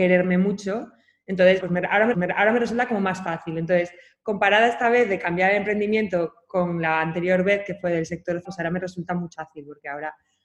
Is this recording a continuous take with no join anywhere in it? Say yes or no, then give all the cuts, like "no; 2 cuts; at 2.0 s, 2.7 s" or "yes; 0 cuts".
no; 4 cuts; at 1.6 s, 2.1 s, 8.4 s, 9.3 s